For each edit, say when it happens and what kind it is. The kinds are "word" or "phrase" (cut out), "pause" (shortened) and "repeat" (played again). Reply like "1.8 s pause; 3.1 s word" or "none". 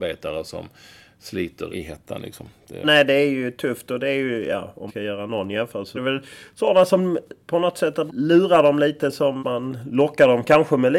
1.7 s word; 2.8 s word; 4.9 s word; 6.0 s word; 8.1 s word; 9.4 s word